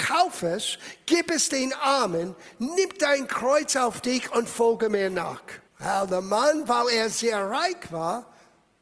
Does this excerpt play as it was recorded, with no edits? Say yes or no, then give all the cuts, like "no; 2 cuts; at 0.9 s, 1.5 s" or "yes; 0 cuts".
no; 1 cut; at 5.7 s